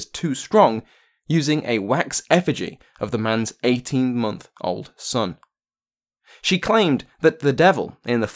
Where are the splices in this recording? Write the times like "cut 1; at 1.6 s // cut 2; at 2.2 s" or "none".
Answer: none